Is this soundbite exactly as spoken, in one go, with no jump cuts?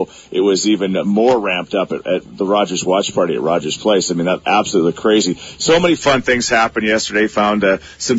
yes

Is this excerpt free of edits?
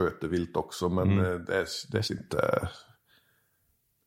no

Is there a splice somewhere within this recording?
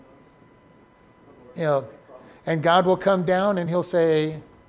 no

